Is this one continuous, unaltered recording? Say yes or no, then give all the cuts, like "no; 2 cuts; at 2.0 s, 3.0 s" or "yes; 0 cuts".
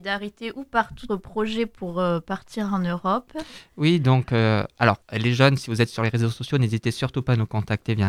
no; 2 cuts; at 1.1 s, 5.0 s